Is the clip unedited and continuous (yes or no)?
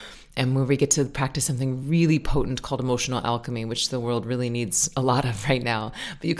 yes